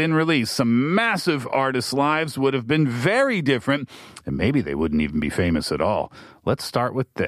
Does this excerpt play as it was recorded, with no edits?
yes; 0 cuts

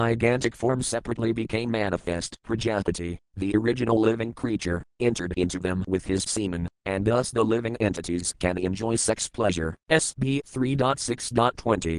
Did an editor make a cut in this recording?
yes; 3 cuts; at 2.4 s, 6.3 s, 9.8 s

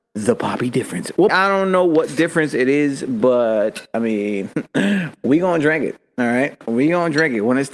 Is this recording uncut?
no; 2 cuts; at 1.3 s, 4.7 s

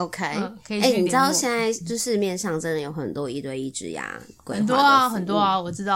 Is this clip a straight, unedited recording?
yes; 0 cuts

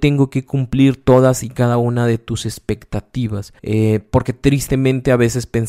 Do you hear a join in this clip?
yes; 1 cut; at 3.6 s

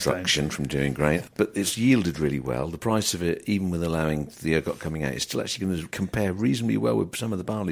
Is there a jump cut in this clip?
no; 0 cuts

